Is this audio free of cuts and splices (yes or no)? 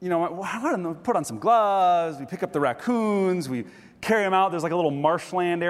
yes